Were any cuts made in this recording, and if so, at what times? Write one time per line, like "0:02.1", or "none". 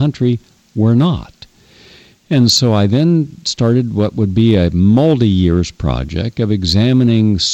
none